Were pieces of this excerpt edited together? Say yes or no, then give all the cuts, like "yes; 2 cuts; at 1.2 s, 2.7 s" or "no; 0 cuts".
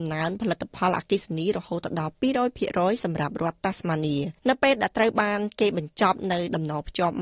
yes; 1 cut; at 4.4 s